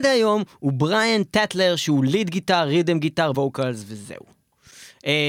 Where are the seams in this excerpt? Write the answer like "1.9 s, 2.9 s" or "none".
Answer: 3.3 s